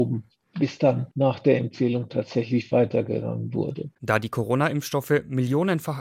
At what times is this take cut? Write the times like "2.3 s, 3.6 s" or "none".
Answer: 1.1 s, 4.0 s